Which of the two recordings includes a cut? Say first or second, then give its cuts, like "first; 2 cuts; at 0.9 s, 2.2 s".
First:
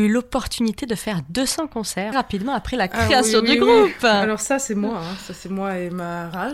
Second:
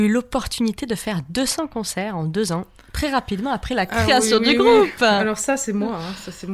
first; 1 cut; at 2.1 s